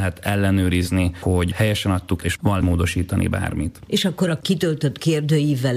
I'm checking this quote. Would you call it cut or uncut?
cut